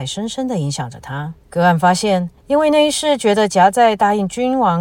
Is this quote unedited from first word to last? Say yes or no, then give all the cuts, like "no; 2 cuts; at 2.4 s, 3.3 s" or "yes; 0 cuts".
no; 2 cuts; at 1.4 s, 2.4 s